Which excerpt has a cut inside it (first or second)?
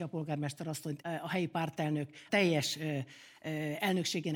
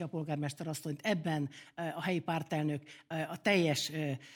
first